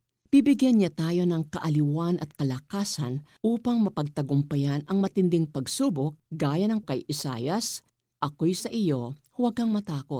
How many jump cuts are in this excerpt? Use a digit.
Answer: 4